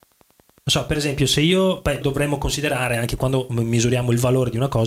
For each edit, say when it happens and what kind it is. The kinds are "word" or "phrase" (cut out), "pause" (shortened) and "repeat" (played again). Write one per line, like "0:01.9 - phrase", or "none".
0:02.0 - word